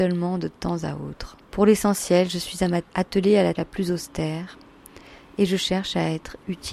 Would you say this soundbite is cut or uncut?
cut